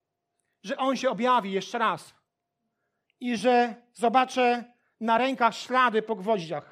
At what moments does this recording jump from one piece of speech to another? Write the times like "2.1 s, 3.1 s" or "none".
none